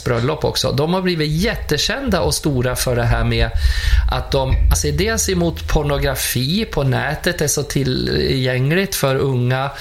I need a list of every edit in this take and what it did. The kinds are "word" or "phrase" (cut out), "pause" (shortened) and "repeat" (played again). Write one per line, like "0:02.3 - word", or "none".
0:04.7 - word